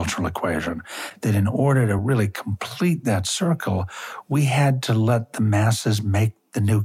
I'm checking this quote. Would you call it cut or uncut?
uncut